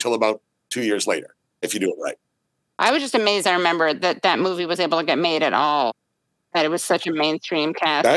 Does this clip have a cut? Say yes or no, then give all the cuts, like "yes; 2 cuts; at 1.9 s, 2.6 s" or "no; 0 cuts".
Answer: no; 0 cuts